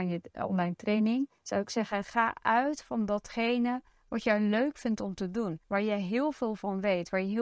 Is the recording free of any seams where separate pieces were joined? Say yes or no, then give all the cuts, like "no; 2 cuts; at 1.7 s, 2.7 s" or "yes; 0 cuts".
no; 2 cuts; at 1.4 s, 5.6 s